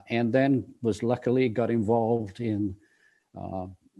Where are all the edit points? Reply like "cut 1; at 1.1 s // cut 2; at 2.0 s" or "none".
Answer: none